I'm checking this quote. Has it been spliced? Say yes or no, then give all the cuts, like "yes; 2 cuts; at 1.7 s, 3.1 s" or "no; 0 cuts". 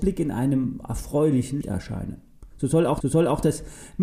yes; 2 cuts; at 1.6 s, 3.0 s